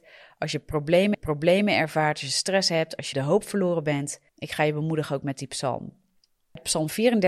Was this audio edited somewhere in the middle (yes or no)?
yes